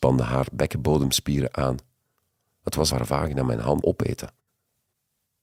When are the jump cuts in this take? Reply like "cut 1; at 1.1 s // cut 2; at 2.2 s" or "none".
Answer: cut 1; at 2.9 s // cut 2; at 3.8 s